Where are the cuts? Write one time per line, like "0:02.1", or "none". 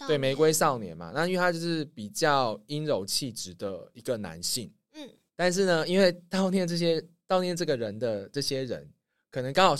0:05.3